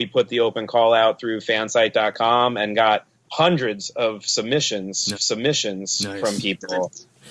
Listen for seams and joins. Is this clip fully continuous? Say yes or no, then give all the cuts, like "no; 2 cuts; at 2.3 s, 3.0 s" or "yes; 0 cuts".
no; 2 cuts; at 3.2 s, 5.1 s